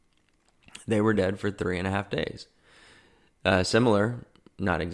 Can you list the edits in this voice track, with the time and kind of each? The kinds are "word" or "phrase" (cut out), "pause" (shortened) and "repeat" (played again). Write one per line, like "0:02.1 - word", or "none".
none